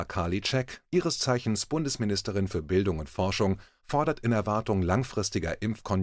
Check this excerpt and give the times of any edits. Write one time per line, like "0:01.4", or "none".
none